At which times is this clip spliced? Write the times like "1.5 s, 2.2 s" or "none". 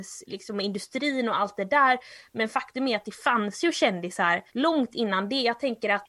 4.5 s